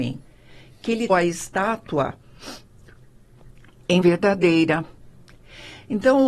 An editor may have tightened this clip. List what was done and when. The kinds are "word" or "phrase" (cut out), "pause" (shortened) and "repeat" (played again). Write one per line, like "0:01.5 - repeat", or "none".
0:01.1 - word
0:04.0 - word

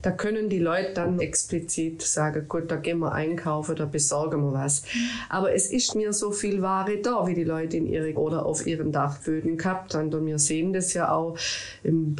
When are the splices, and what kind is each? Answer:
0:01.2 - word
0:05.9 - word
0:08.1 - word

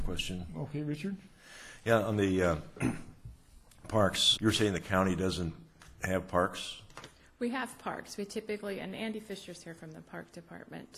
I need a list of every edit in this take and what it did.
0:04.4 - word

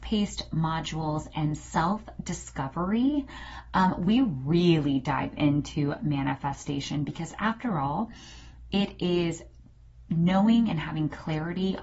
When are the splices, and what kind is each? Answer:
none

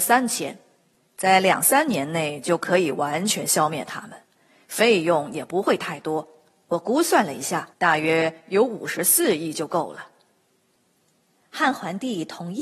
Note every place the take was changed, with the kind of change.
0:07.7 - pause

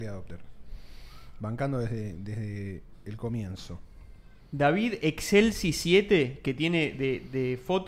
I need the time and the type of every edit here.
0:04.4 - pause

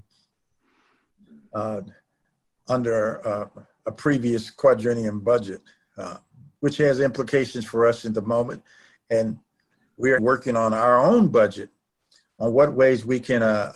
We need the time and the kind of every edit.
0:10.2 - word

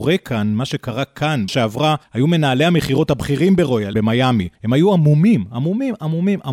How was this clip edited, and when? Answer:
0:01.5 - word
0:02.0 - pause
0:03.9 - phrase
0:04.5 - pause

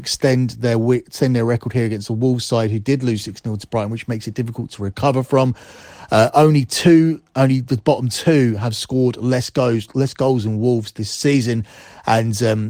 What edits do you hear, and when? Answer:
none

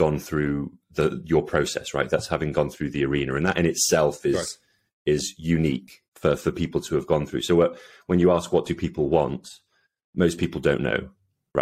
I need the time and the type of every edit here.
0:06.1 - pause

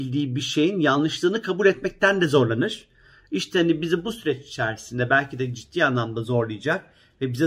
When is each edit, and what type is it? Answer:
none

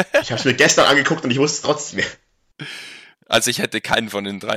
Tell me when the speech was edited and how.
0:01.9 - word

